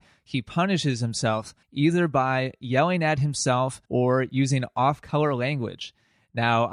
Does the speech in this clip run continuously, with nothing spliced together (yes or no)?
no